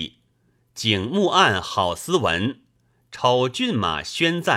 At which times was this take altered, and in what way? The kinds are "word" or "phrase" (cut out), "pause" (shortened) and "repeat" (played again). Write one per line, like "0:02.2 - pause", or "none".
none